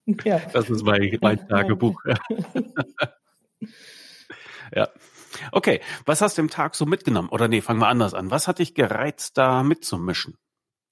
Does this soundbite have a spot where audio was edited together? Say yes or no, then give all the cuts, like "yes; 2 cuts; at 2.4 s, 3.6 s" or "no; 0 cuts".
yes; 2 cuts; at 1.2 s, 6.3 s